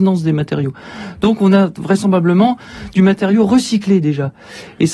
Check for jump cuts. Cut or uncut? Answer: uncut